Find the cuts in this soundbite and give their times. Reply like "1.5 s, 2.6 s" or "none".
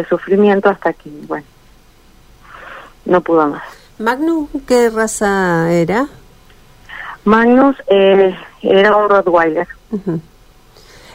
none